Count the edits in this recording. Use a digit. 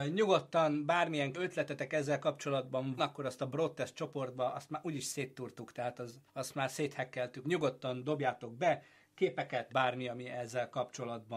5